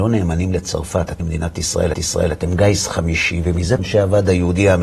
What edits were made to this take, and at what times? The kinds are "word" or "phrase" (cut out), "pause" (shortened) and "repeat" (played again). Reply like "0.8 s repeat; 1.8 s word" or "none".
1.2 s word; 1.9 s repeat; 3.8 s word